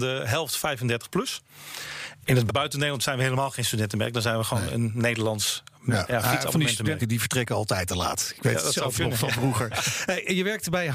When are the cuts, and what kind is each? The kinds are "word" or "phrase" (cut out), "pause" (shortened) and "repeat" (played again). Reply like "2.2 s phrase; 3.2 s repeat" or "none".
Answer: 2.5 s word; 7.0 s word